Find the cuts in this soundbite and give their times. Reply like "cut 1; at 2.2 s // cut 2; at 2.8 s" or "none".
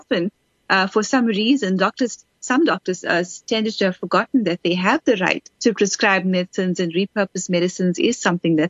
cut 1; at 5.5 s